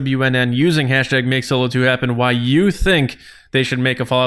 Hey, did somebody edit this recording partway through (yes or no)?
no